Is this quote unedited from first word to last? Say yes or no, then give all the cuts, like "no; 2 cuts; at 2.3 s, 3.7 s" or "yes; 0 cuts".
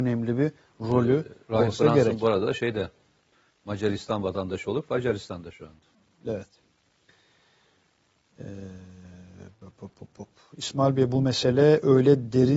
yes; 0 cuts